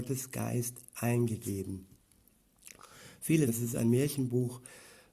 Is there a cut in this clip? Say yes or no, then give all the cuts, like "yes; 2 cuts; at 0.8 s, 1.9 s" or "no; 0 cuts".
yes; 1 cut; at 3.5 s